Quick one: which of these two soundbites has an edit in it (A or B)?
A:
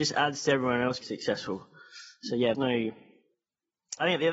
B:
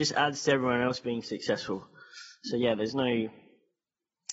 A